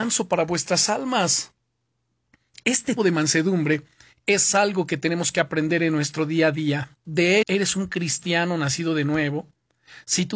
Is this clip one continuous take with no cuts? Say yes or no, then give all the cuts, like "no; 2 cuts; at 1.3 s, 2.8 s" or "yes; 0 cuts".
no; 2 cuts; at 3.0 s, 7.4 s